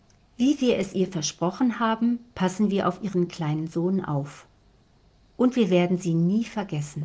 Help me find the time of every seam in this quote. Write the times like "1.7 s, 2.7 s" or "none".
none